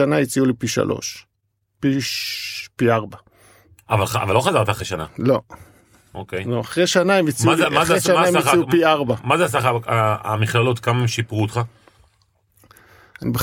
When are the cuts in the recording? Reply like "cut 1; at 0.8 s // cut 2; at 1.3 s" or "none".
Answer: none